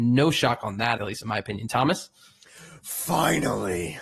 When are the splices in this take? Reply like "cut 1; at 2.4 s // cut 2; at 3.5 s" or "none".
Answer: cut 1; at 1.0 s